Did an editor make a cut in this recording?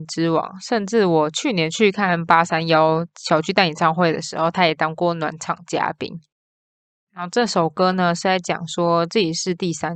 yes; 1 cut; at 6.6 s

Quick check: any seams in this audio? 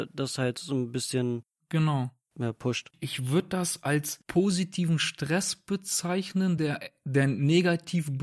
no; 0 cuts

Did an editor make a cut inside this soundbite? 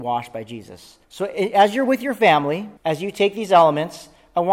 yes; 2 cuts; at 1.0 s, 2.8 s

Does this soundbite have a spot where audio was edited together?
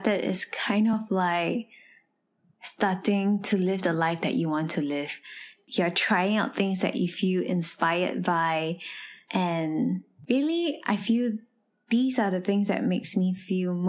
no; 0 cuts

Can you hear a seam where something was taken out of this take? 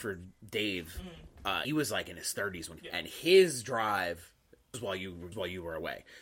yes; 4 cuts; at 1.6 s, 2.8 s, 4.7 s, 5.3 s

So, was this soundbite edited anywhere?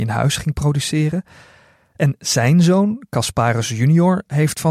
no; 0 cuts

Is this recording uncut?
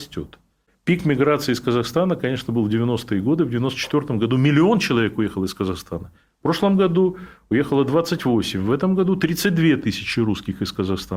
yes; 0 cuts

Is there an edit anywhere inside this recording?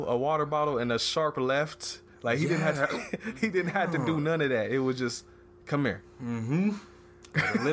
no; 0 cuts

